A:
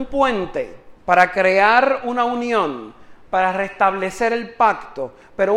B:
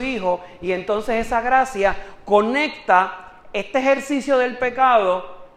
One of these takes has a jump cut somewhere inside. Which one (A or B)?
A